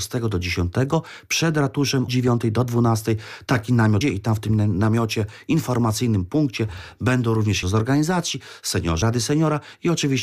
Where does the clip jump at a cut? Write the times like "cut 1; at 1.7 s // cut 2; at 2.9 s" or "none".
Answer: cut 1; at 2.1 s // cut 2; at 4.0 s // cut 3; at 7.6 s // cut 4; at 9.0 s